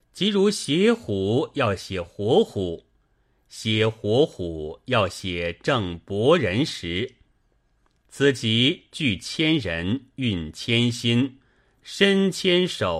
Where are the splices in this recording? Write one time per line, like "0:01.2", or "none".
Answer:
none